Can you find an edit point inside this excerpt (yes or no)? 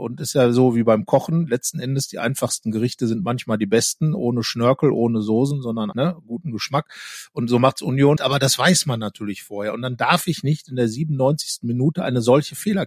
yes